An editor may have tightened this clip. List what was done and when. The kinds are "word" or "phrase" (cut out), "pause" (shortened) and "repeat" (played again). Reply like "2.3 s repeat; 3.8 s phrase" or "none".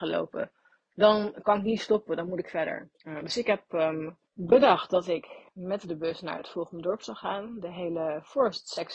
2.9 s pause; 4.3 s pause; 5.5 s pause